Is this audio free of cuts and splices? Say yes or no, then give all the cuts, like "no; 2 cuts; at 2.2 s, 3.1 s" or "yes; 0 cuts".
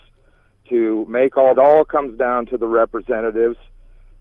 no; 1 cut; at 1.5 s